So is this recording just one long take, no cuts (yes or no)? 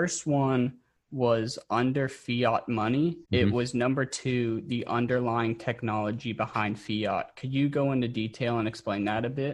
no